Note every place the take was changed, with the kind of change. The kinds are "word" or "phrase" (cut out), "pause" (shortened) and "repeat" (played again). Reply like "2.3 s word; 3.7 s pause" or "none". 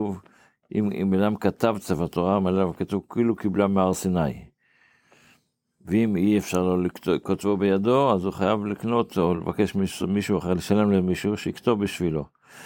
none